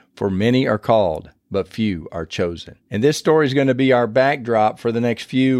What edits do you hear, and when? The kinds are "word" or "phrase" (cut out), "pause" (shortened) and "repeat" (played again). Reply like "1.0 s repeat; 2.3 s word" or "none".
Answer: 2.8 s pause